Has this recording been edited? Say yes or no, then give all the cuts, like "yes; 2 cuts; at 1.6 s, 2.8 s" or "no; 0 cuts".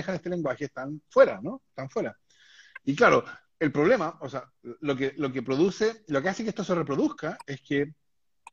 no; 0 cuts